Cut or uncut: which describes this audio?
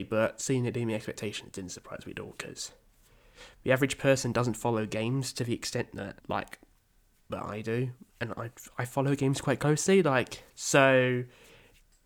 cut